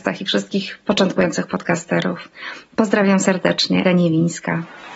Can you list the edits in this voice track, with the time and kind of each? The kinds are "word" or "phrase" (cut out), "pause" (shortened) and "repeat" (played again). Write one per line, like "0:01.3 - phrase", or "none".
0:03.8 - word